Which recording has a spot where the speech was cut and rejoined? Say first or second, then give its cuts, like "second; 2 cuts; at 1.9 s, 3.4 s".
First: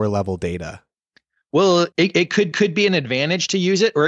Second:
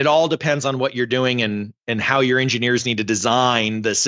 first; 2 cuts; at 1.9 s, 2.5 s